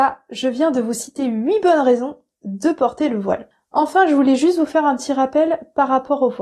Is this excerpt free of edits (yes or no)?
yes